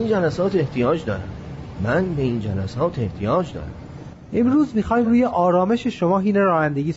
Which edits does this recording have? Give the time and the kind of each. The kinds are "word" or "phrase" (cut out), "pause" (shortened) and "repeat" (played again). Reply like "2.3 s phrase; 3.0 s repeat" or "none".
none